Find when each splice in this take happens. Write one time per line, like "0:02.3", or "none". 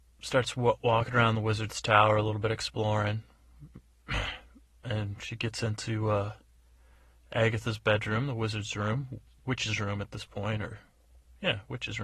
none

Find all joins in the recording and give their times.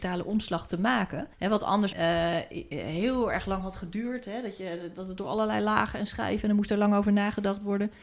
0:01.3
0:01.9

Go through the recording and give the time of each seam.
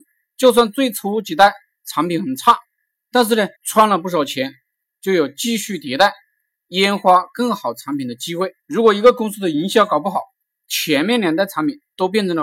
0:03.6
0:08.6

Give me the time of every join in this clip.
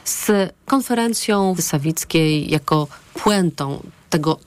0:01.6

